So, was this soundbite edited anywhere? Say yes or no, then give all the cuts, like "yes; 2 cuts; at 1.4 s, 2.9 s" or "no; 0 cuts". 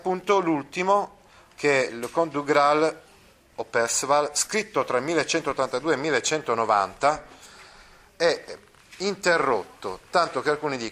no; 0 cuts